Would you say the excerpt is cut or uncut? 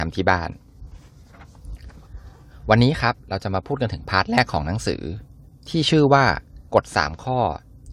cut